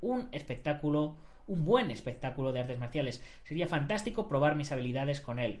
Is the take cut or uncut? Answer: uncut